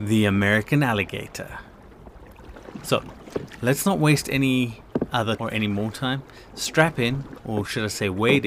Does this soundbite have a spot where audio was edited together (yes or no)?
yes